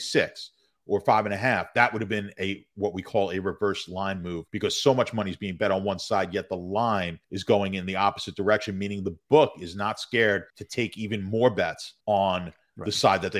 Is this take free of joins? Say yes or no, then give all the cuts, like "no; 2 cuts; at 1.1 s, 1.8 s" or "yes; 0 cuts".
no; 4 cuts; at 4.5 s, 7.2 s, 10.5 s, 12.0 s